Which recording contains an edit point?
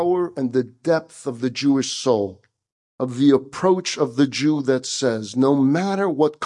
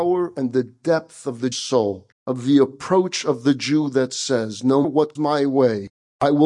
second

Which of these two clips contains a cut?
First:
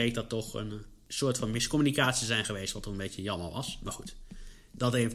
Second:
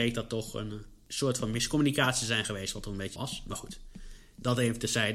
second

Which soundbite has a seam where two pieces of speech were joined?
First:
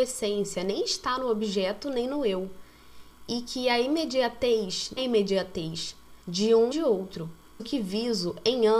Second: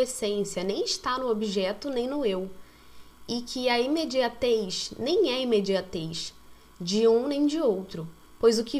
first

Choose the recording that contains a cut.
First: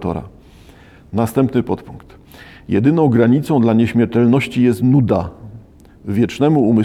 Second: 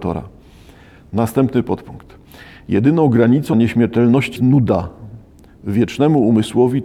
second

